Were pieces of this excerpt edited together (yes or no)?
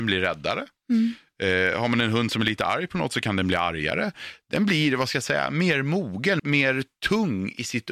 yes